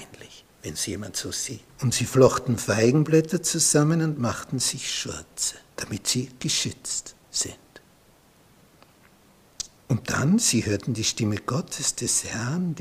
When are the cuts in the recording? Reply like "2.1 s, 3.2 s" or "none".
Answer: 1.7 s, 5.7 s